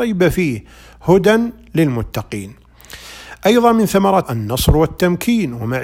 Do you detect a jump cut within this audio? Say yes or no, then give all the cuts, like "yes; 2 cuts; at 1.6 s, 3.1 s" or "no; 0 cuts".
yes; 1 cut; at 4.2 s